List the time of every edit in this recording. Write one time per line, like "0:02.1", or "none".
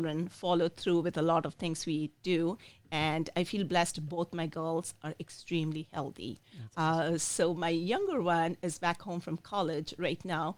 none